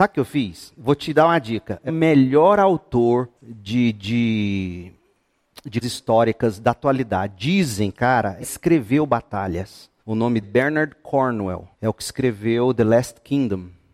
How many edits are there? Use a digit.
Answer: 8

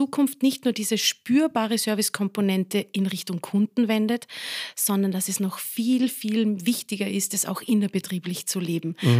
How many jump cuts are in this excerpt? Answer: 0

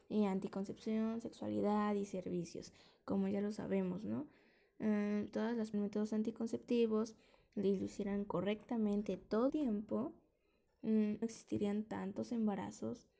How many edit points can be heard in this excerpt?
4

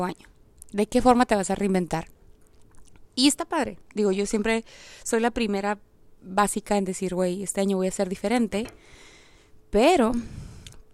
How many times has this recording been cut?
0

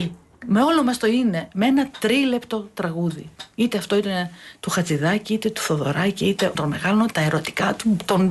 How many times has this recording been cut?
2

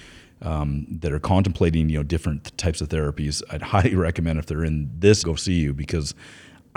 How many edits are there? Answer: 1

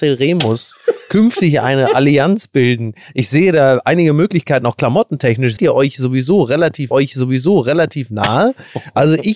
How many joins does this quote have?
2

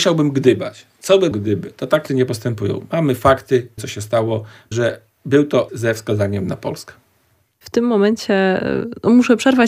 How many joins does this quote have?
5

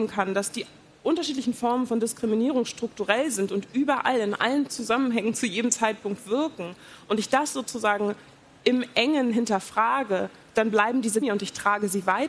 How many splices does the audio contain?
1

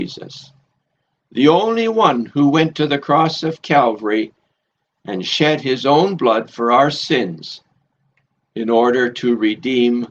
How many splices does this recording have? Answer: 0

